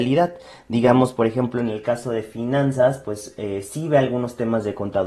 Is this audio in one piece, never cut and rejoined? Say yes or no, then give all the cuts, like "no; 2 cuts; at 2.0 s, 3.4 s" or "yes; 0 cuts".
yes; 0 cuts